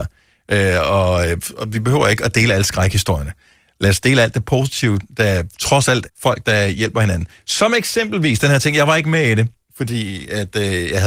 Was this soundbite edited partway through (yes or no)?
yes